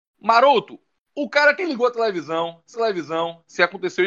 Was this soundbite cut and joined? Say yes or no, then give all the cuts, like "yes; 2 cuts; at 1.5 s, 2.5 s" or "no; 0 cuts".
yes; 2 cuts; at 1.6 s, 2.7 s